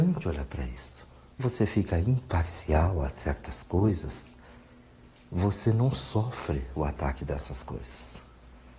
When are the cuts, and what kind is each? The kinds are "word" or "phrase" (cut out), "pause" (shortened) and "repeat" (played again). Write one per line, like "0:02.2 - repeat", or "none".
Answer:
0:01.4 - word